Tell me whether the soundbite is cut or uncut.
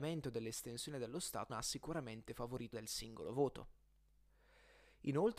cut